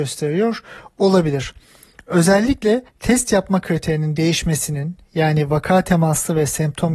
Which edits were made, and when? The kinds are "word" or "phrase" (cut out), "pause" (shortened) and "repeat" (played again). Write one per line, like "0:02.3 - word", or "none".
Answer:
0:02.9 - pause